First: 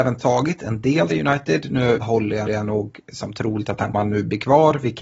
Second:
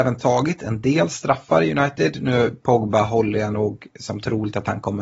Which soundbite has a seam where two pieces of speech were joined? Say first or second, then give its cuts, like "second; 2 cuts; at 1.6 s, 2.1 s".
first; 4 cuts; at 1.1 s, 2.0 s, 2.5 s, 3.9 s